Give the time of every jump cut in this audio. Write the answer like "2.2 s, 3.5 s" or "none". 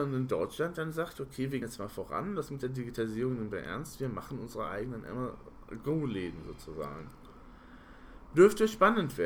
1.6 s